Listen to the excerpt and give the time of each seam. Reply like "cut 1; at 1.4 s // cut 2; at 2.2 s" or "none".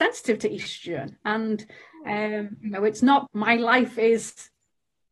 cut 1; at 3.3 s